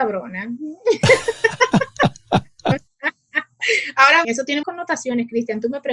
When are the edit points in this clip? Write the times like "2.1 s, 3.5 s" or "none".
4.2 s, 4.6 s